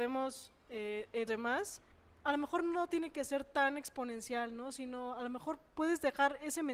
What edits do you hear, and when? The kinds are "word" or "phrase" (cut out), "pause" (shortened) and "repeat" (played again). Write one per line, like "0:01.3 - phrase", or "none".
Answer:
0:01.3 - phrase
0:01.9 - pause